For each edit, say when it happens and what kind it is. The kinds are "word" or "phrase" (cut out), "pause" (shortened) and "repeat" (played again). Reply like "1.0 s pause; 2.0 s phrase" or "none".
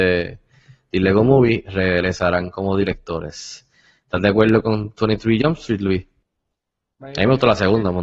none